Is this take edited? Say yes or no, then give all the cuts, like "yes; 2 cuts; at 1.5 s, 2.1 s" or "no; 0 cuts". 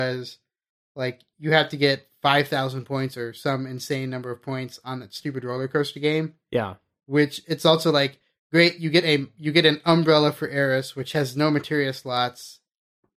no; 0 cuts